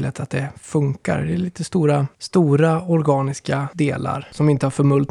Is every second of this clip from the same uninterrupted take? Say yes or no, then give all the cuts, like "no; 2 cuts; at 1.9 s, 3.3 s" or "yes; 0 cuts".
yes; 0 cuts